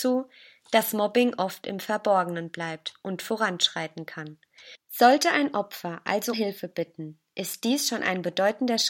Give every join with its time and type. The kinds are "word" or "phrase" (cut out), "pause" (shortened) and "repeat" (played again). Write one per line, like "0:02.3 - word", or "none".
0:06.3 - word